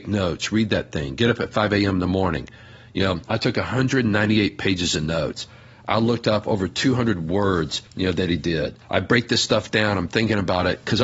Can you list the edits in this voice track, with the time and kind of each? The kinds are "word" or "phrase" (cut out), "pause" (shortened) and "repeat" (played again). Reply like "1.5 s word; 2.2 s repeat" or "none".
7.9 s pause; 8.8 s pause